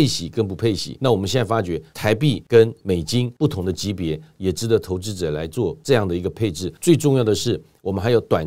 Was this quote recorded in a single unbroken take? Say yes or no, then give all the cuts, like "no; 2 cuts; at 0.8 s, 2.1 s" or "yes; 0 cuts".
yes; 0 cuts